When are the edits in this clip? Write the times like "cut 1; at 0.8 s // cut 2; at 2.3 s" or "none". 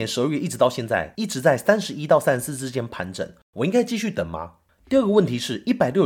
none